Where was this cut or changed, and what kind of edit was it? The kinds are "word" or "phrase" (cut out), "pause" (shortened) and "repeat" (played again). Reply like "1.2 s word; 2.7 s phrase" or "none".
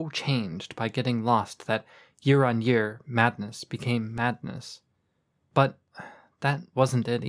none

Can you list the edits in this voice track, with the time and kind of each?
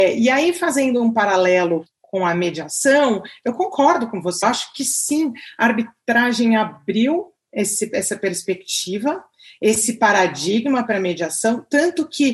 1.9 s word; 4.4 s word

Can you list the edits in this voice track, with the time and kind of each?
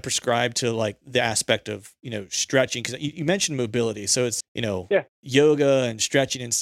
1.0 s word; 4.4 s word

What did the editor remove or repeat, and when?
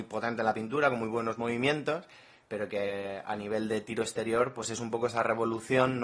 none

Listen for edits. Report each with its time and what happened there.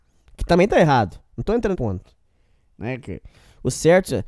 1.7 s word

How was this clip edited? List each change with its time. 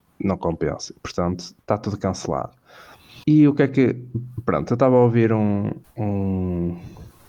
1.6 s pause; 3.2 s pause; 5.8 s pause

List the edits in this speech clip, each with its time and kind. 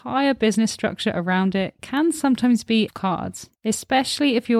2.9 s phrase; 3.5 s pause

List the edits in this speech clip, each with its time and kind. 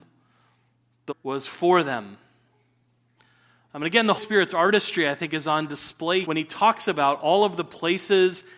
1.1 s word; 4.2 s word; 6.2 s word

